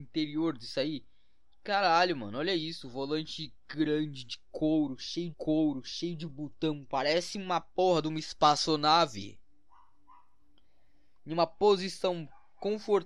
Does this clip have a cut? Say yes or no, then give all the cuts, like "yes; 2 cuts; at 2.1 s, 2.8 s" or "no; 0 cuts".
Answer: yes; 1 cut; at 5.3 s